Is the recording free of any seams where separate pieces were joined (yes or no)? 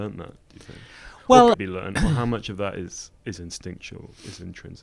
no